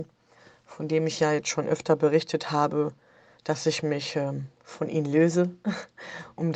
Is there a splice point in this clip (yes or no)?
no